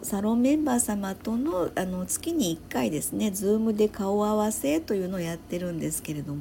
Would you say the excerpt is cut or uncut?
uncut